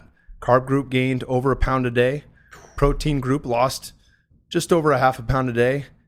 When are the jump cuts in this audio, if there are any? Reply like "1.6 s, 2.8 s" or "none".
none